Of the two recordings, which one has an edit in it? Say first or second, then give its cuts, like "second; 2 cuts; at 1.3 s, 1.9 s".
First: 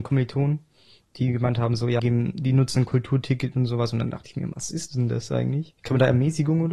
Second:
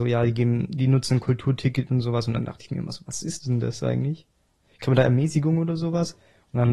first; 3 cuts; at 2.0 s, 4.5 s, 5.8 s